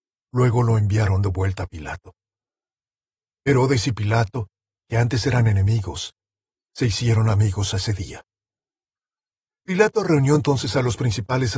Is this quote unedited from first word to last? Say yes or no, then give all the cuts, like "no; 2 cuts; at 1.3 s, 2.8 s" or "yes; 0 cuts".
yes; 0 cuts